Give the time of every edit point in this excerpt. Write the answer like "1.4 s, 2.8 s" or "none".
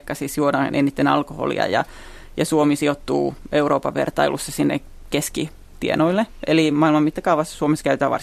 none